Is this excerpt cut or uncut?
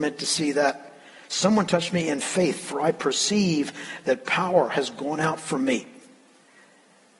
uncut